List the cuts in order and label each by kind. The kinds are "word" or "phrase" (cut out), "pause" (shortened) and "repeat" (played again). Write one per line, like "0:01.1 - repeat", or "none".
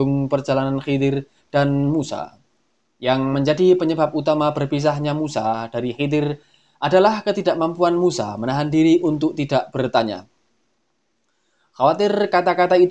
none